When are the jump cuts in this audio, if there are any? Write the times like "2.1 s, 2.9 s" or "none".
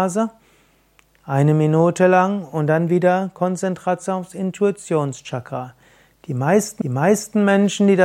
6.8 s

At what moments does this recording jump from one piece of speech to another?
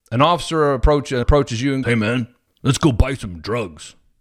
1.2 s, 1.8 s, 2.5 s

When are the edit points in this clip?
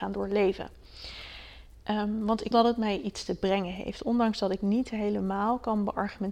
2.5 s

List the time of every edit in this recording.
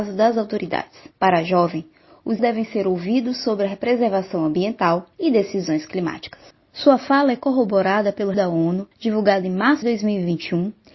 1.1 s, 2.4 s, 5.1 s, 6.5 s, 8.3 s, 8.9 s, 9.8 s

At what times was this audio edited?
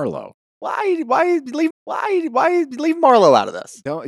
1.7 s

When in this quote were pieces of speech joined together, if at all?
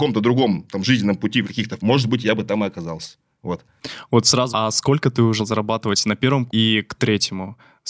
1.4 s, 1.8 s, 4.5 s, 5.4 s, 6.5 s

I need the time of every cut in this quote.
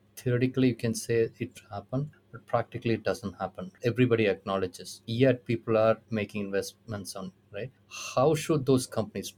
1.5 s, 7.4 s

